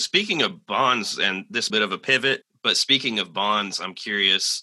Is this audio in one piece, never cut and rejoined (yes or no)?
no